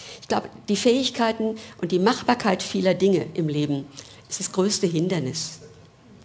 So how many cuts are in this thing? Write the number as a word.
one